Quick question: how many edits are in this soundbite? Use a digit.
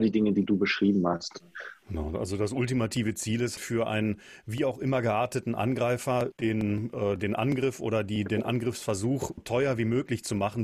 4